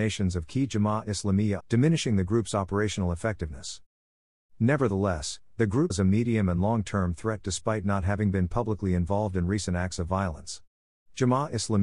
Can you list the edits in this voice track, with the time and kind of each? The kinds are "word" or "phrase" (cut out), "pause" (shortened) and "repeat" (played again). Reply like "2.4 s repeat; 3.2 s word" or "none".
1.6 s phrase; 5.9 s word